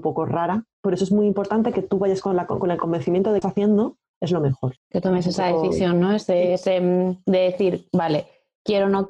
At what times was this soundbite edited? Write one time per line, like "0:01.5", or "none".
0:03.4
0:04.8